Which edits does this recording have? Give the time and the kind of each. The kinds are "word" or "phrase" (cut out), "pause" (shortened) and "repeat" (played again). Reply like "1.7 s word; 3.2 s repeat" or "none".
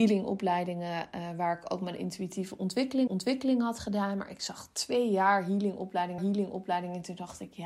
3.1 s repeat; 6.2 s repeat